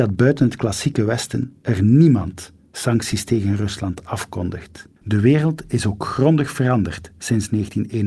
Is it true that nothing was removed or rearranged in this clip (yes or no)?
no